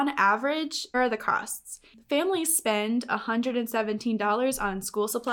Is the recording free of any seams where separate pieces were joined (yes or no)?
no